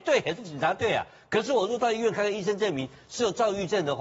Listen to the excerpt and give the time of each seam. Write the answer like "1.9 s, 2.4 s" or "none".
none